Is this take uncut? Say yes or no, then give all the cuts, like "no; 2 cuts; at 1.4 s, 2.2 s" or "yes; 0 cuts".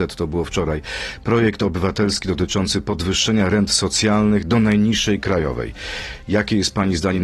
yes; 0 cuts